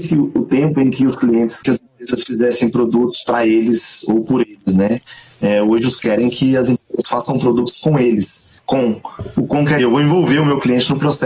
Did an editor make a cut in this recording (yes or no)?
yes